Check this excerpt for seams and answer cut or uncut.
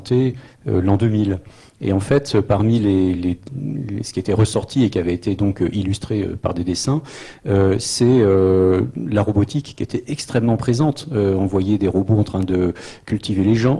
uncut